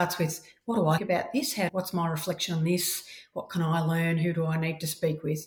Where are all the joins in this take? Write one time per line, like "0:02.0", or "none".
0:01.0
0:01.7